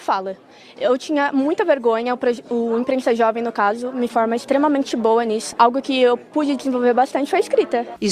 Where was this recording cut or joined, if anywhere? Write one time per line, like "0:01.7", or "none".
0:04.1